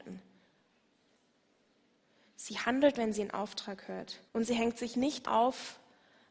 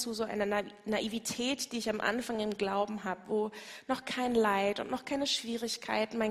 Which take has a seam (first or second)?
first